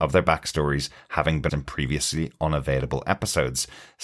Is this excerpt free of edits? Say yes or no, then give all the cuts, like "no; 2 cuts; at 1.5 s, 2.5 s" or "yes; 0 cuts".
no; 1 cut; at 1.5 s